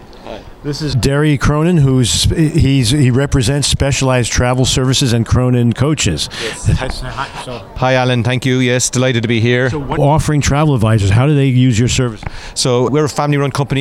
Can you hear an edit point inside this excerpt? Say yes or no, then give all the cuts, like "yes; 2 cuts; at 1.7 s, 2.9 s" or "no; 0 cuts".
yes; 3 cuts; at 0.9 s, 10.0 s, 12.9 s